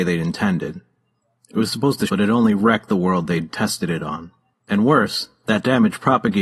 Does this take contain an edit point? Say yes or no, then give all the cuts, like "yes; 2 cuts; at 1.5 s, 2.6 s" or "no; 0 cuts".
yes; 1 cut; at 2.1 s